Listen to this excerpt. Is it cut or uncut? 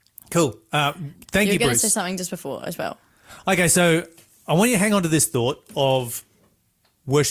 uncut